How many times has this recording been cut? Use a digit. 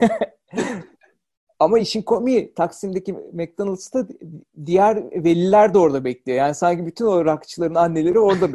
0